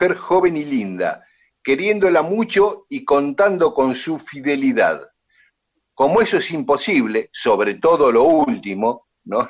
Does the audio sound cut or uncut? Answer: uncut